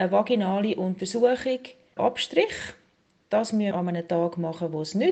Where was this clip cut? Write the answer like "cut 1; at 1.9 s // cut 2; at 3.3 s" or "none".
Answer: cut 1; at 2.0 s // cut 2; at 3.7 s